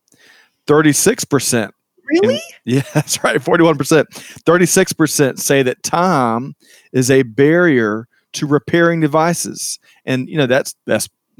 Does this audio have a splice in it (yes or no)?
no